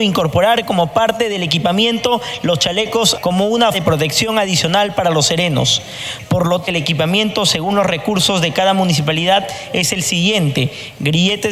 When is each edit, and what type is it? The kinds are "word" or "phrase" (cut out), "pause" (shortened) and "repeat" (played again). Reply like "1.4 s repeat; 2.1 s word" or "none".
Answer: 3.1 s word; 3.7 s word; 6.6 s word